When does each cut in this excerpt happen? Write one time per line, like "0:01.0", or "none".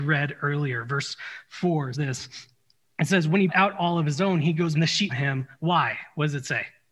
0:01.9
0:03.5
0:04.7
0:05.1